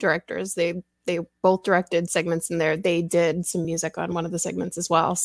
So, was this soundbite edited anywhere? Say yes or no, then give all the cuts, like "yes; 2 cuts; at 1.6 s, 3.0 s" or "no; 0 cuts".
no; 0 cuts